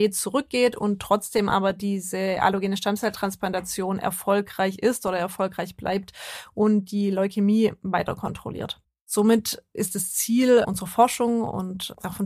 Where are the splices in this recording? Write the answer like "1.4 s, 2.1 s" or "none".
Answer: none